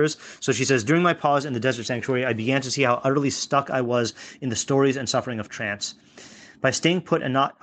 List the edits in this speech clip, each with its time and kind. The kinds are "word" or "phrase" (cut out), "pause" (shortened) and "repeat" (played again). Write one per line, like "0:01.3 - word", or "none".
none